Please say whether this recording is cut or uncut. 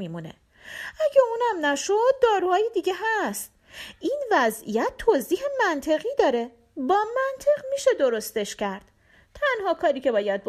uncut